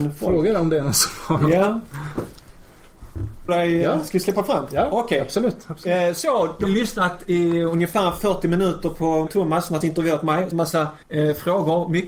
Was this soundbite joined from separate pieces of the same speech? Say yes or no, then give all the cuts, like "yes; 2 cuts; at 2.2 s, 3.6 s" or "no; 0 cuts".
yes; 6 cuts; at 3.5 s, 6.7 s, 9.3 s, 9.8 s, 10.5 s, 11.0 s